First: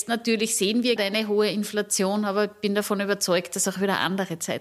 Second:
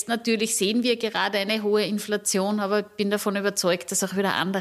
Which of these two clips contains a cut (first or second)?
first